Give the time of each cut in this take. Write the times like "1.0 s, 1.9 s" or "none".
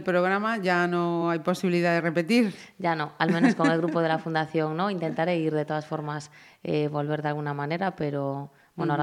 none